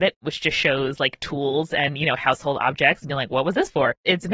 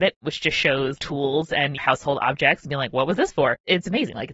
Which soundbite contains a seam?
second; 2 cuts; at 1.0 s, 1.8 s

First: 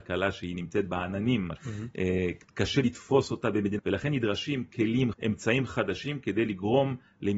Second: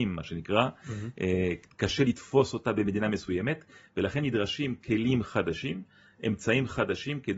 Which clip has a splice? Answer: first; 3 cuts; at 1.6 s, 3.8 s, 5.1 s

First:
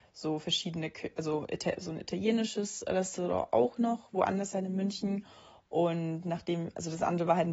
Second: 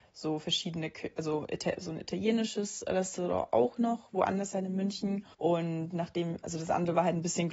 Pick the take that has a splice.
second; 1 cut; at 5.3 s

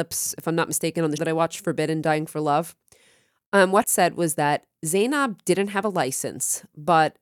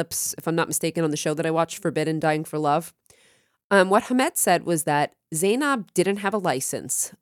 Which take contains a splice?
first; 2 cuts; at 1.2 s, 3.8 s

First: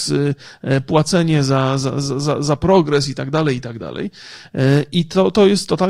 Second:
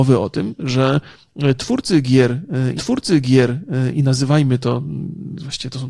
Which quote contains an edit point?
second; 1 cut; at 2.8 s

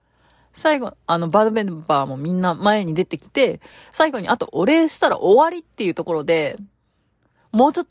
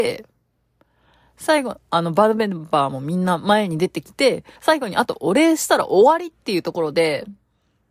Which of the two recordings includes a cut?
second; 1 cut; at 4.6 s

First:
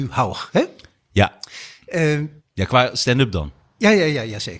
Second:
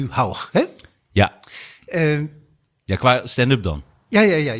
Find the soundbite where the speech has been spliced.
first; 1 cut; at 2.4 s

